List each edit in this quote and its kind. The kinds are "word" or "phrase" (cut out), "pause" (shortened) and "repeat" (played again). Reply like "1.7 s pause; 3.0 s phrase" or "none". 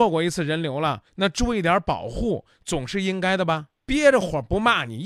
1.1 s pause; 3.8 s pause

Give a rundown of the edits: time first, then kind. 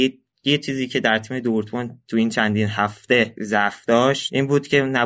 none

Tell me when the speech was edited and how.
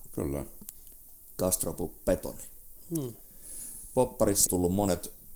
4.5 s phrase

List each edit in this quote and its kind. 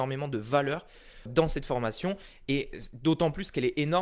1.3 s word

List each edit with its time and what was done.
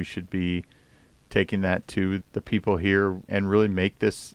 2.2 s word; 3.3 s word

